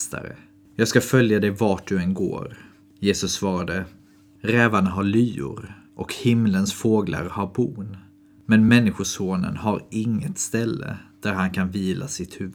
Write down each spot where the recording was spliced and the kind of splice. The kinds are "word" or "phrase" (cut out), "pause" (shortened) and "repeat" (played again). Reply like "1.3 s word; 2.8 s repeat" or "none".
none